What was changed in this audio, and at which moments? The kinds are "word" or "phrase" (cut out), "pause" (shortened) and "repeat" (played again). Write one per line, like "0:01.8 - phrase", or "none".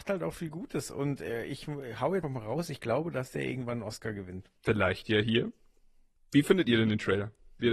0:02.2 - word
0:04.6 - pause